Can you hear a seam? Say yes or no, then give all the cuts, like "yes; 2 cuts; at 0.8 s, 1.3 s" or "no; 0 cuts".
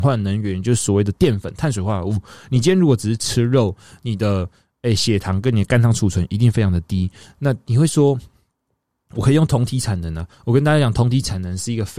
no; 0 cuts